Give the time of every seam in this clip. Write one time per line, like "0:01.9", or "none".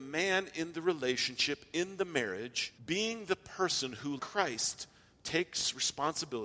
0:02.8
0:04.2